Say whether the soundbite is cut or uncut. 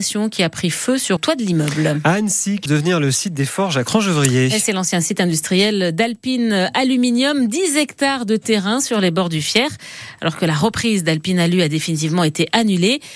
cut